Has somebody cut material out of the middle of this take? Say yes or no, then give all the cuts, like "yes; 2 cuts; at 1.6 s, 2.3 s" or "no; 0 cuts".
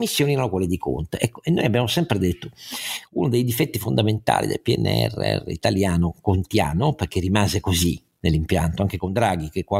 no; 0 cuts